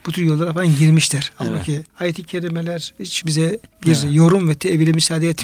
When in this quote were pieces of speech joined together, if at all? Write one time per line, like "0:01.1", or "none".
0:01.9
0:03.2
0:03.7